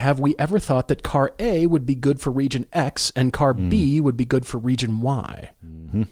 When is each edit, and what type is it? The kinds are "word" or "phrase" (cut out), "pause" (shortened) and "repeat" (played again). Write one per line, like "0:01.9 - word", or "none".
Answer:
none